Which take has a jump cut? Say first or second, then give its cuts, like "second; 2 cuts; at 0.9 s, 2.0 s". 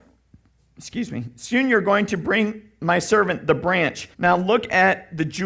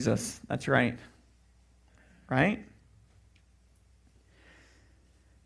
first; 1 cut; at 4.1 s